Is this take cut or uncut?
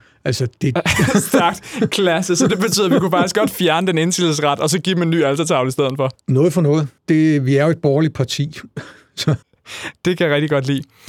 cut